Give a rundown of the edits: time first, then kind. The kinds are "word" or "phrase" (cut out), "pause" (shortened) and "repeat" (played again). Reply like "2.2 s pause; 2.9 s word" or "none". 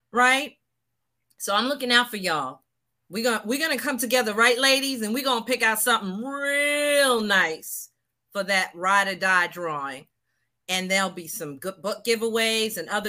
none